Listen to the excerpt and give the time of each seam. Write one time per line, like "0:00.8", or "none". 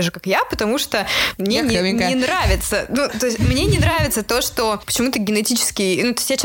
none